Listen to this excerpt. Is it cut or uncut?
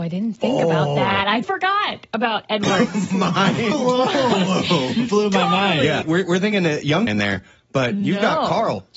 cut